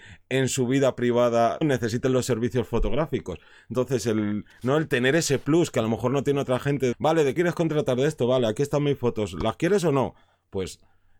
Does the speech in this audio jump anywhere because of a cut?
yes; 3 cuts; at 1.6 s, 6.9 s, 7.4 s

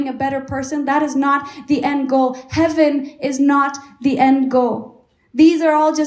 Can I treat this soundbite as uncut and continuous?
yes; 0 cuts

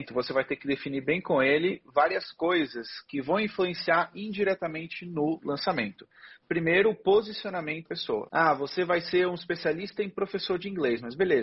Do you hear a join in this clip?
yes; 1 cut; at 7.9 s

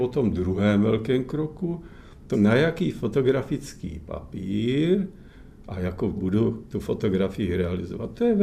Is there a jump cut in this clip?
yes; 2 cuts; at 2.3 s, 6.1 s

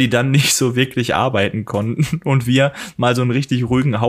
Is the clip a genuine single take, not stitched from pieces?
yes; 0 cuts

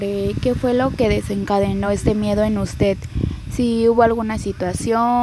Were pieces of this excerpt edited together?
no; 0 cuts

